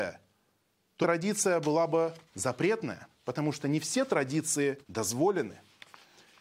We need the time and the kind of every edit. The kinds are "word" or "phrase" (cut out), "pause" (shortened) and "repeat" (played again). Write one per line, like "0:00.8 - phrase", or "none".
0:01.0 - word
0:02.3 - pause
0:04.8 - pause